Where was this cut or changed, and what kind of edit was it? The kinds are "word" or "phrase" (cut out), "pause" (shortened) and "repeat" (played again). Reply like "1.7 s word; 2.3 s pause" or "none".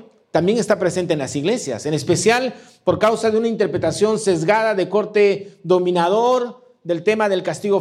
none